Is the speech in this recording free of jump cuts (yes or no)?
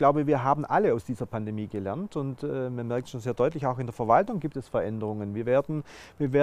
yes